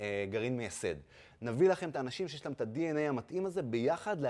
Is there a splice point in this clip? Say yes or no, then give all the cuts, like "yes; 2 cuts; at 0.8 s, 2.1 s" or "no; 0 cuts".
no; 0 cuts